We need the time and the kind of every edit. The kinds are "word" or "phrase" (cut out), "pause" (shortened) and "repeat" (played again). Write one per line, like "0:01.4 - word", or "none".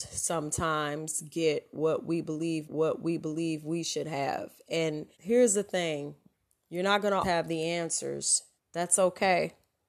0:02.6 - repeat
0:05.1 - pause
0:06.3 - pause
0:07.2 - word
0:08.6 - pause